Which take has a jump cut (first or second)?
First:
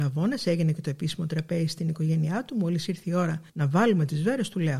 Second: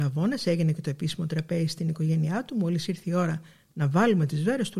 first